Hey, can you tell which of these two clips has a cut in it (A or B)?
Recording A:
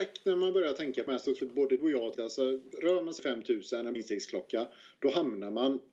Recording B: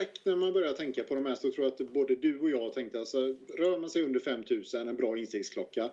A